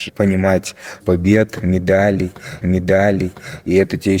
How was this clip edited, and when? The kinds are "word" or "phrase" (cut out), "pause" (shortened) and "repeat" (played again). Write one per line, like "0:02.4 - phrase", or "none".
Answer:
0:01.0 - word
0:02.6 - repeat